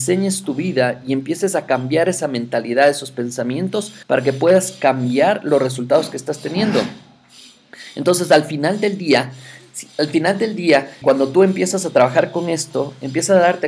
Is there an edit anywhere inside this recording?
yes; 2 cuts; at 4.0 s, 11.0 s

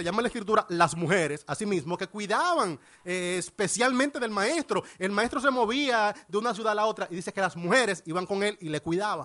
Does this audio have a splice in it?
no; 0 cuts

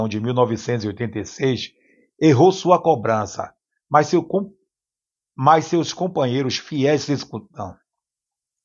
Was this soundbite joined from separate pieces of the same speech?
no; 0 cuts

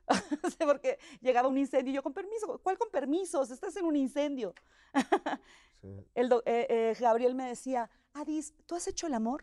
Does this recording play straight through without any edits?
yes; 0 cuts

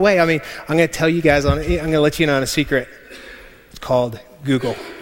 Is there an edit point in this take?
no; 0 cuts

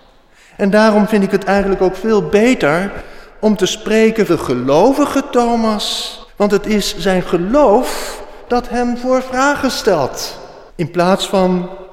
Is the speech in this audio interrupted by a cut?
yes; 3 cuts; at 4.3 s, 6.3 s, 10.7 s

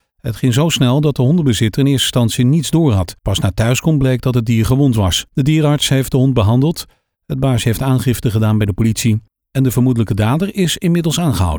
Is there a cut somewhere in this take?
yes; 2 cuts; at 3.2 s, 5.3 s

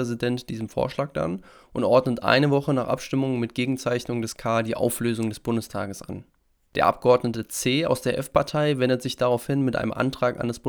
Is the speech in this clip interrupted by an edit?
no; 0 cuts

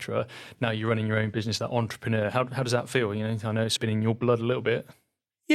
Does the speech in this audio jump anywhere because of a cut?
yes; 1 cut; at 3.8 s

